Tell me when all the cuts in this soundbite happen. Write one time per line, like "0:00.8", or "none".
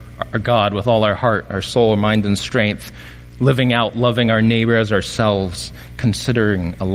none